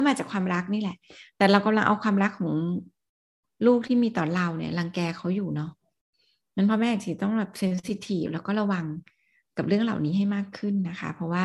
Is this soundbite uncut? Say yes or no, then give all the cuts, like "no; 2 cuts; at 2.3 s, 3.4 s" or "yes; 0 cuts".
yes; 0 cuts